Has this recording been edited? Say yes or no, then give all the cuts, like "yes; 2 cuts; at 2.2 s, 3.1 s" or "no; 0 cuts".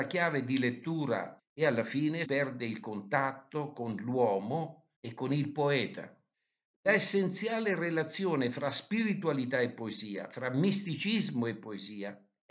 yes; 4 cuts; at 1.4 s, 2.2 s, 4.9 s, 6.3 s